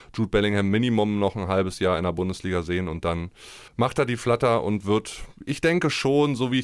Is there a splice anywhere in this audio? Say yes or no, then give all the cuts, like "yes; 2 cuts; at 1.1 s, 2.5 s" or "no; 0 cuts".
yes; 1 cut; at 3.7 s